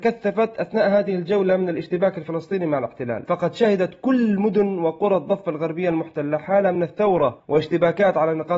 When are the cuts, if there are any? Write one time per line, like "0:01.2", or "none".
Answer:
none